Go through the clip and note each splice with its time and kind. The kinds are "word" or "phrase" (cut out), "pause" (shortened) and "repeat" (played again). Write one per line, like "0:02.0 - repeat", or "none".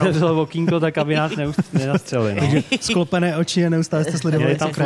none